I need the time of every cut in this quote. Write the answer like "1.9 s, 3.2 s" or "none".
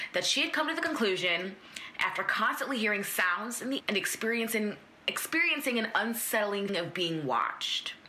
3.8 s, 6.7 s